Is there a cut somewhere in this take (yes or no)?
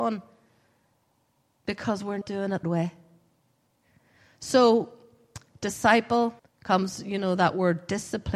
yes